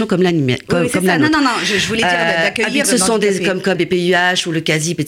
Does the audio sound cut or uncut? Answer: cut